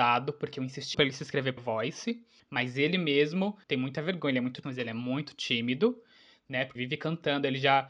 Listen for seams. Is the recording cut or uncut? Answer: cut